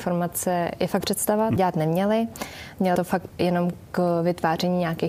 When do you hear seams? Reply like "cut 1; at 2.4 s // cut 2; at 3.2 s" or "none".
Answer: cut 1; at 1.0 s // cut 2; at 1.6 s // cut 3; at 3.0 s // cut 4; at 3.3 s